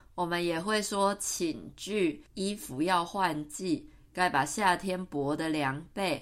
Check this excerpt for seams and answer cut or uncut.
cut